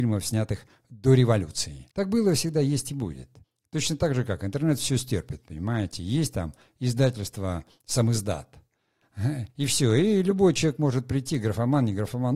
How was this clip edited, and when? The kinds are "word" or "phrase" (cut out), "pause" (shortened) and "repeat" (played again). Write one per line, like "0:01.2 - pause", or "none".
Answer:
0:01.9 - pause
0:03.4 - pause
0:09.5 - pause

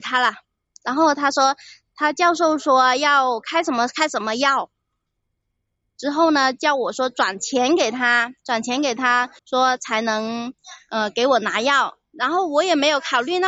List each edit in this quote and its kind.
0:09.4 - pause

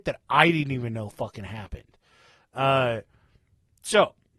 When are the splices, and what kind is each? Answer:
none

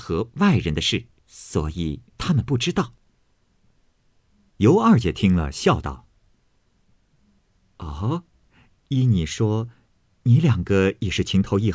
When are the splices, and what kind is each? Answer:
0:01.2 - pause
0:02.1 - pause

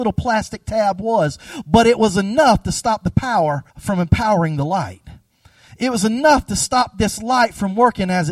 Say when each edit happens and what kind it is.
0:03.7 - pause

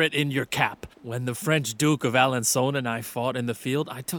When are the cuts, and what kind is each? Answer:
0:00.9 - pause

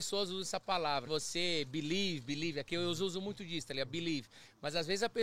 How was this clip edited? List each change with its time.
0:01.1 - phrase

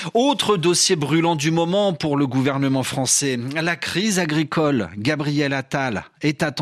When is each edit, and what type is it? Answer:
none

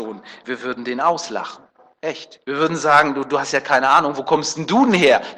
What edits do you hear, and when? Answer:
none

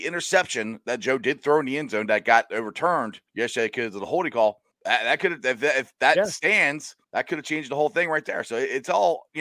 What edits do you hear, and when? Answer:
0:03.3 - pause
0:04.7 - pause
0:07.0 - pause

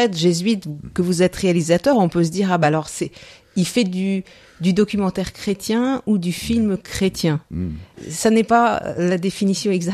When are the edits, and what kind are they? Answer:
none

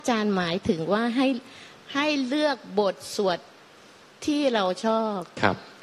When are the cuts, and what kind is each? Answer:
none

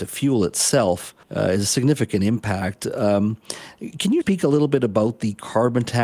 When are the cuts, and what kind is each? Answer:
0:01.2 - pause
0:04.2 - word

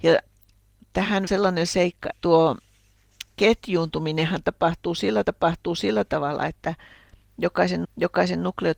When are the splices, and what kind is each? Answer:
0:01.3 - word
0:02.1 - word
0:03.3 - pause
0:05.2 - repeat
0:07.8 - repeat

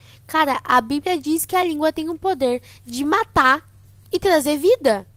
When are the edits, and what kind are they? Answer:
none

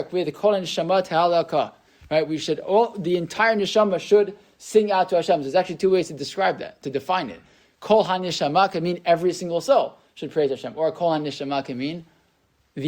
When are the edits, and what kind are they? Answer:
none

